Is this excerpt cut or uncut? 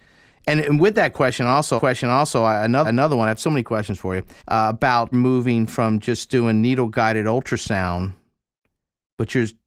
cut